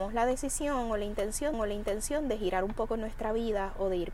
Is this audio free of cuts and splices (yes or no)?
no